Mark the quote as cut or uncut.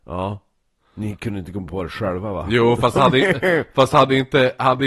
uncut